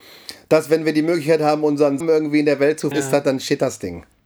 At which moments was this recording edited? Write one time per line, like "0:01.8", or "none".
0:02.0
0:02.9

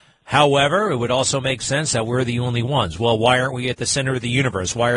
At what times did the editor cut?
none

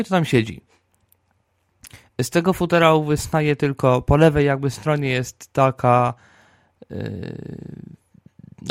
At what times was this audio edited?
none

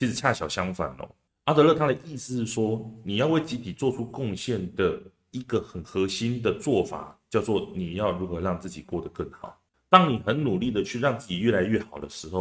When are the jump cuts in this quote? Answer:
none

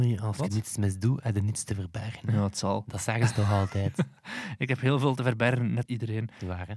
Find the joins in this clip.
0:05.9

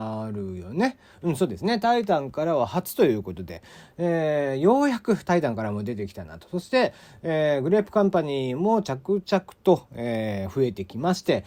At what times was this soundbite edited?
none

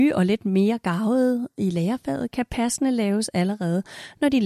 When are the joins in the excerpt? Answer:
none

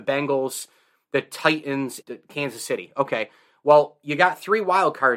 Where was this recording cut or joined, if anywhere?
0:02.0

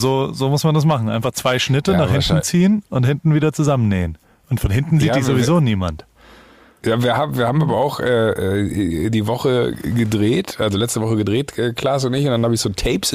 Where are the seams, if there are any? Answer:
none

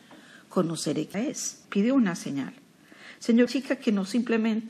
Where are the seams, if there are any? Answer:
0:01.1
0:01.6
0:03.5

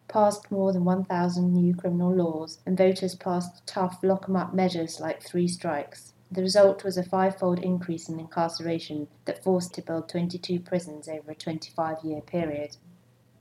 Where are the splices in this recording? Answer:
0:02.6
0:06.2
0:09.2
0:09.7

